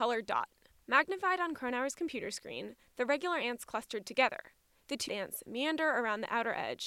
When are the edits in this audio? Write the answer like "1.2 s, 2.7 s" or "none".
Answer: 5.1 s